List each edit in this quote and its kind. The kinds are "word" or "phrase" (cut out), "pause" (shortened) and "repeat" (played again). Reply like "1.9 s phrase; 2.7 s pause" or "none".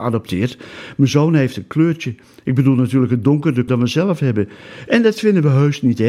3.7 s word